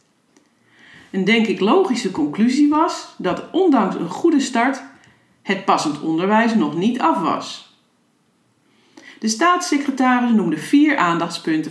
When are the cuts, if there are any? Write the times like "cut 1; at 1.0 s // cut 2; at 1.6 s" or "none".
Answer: none